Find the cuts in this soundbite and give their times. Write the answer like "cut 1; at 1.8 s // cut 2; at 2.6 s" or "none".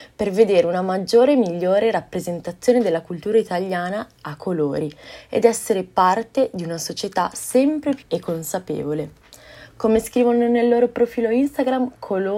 cut 1; at 8.0 s